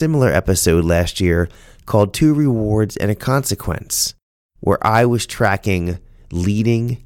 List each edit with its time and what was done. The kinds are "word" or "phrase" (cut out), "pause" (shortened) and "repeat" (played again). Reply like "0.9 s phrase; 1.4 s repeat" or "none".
none